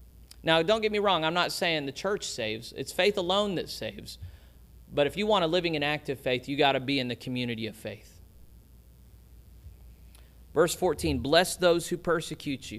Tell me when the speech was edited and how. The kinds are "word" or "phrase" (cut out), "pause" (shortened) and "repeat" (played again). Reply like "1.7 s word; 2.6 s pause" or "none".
none